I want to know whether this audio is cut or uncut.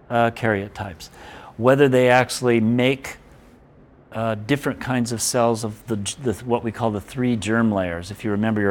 uncut